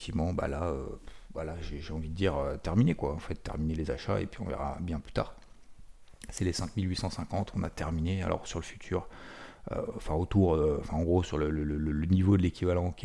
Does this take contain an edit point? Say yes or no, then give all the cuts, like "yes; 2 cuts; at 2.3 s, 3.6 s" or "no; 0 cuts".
no; 0 cuts